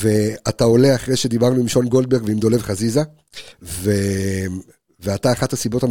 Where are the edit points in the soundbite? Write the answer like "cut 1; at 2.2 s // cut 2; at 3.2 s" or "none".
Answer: cut 1; at 3.5 s